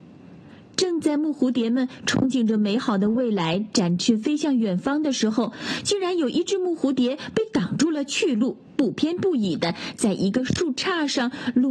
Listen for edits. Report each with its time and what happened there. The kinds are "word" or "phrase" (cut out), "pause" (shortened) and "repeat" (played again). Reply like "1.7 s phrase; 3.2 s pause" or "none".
8.7 s pause